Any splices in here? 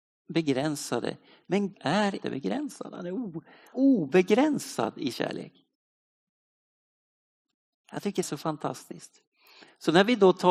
yes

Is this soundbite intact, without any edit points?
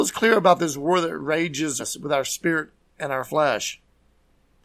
no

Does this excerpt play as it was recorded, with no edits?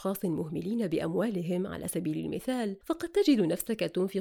yes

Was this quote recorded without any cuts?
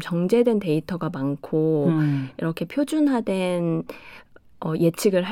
yes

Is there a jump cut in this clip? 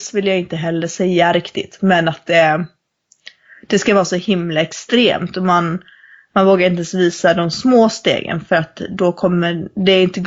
no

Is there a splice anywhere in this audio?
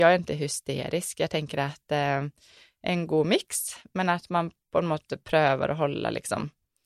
no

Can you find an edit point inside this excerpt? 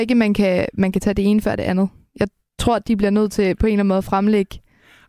no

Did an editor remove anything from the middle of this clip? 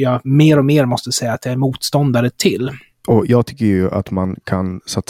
no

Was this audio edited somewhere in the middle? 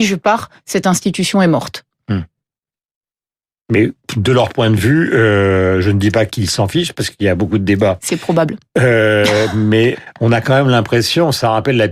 yes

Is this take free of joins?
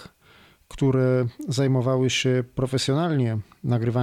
yes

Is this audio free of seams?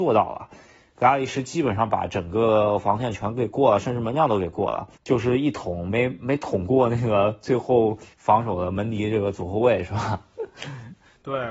no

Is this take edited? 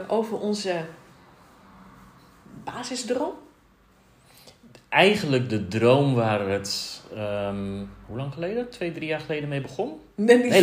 no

